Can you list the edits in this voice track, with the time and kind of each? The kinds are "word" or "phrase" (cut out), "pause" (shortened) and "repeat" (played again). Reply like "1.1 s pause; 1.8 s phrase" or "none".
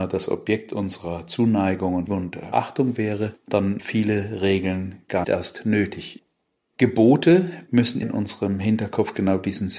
2.1 s word; 2.5 s word; 3.8 s word; 5.2 s word; 8.0 s word